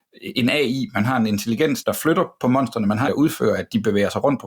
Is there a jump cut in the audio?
yes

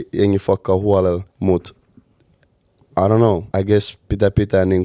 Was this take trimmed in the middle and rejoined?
yes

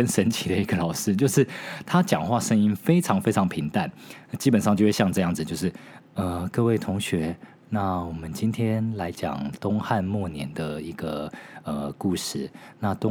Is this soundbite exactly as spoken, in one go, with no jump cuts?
yes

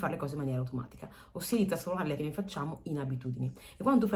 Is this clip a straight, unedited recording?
no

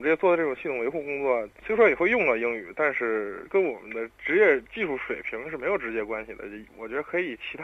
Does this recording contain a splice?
no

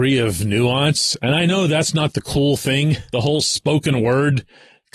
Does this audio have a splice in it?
yes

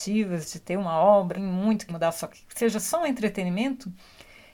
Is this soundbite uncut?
no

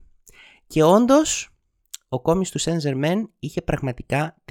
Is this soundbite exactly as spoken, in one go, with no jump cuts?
yes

